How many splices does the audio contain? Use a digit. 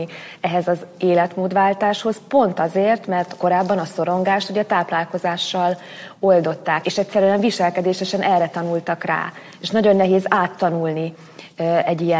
1